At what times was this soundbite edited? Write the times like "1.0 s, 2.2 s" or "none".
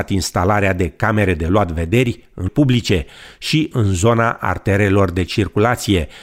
2.5 s